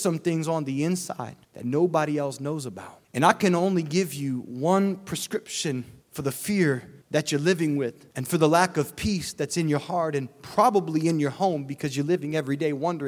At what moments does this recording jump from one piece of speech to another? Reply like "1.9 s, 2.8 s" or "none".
1.4 s, 3.0 s, 6.0 s, 7.0 s, 8.1 s